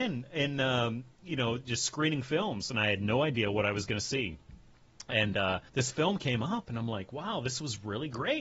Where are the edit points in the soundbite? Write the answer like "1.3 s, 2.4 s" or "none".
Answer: 5.7 s

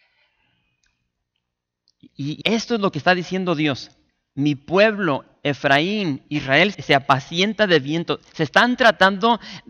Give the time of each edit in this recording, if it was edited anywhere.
2.4 s, 6.7 s

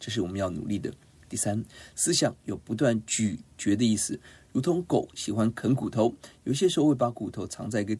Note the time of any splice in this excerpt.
none

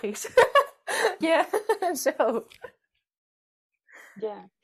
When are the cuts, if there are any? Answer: 1.2 s

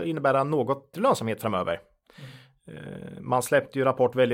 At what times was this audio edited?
0.9 s

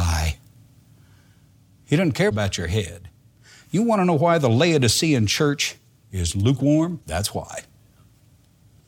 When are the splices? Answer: 7.0 s

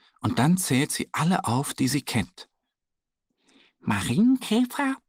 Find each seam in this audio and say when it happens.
none

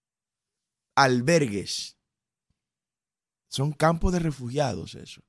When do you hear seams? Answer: none

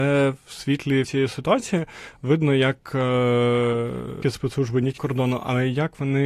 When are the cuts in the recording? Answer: 1.0 s, 4.2 s, 5.0 s

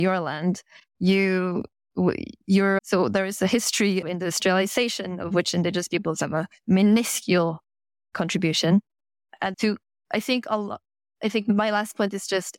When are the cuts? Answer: 4.0 s, 9.5 s

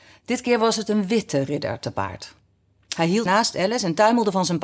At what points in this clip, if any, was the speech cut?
3.3 s

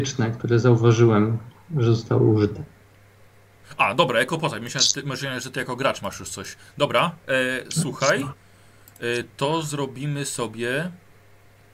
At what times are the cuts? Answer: none

